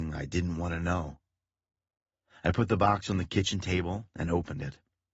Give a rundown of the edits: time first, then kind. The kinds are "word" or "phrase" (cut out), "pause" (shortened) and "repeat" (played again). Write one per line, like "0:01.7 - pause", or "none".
none